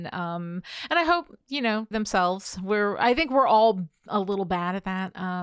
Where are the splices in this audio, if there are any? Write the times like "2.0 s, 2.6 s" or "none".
1.9 s